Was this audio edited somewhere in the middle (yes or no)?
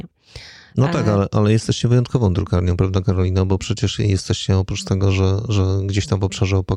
no